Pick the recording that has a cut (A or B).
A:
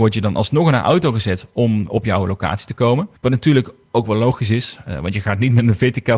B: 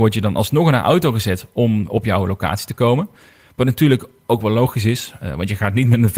A